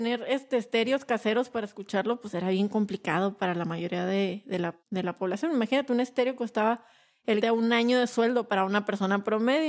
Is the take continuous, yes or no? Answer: no